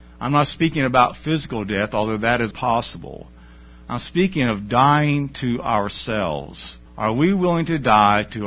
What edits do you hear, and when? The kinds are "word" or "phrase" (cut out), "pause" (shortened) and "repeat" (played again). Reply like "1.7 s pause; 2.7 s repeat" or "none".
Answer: 2.5 s word; 6.9 s pause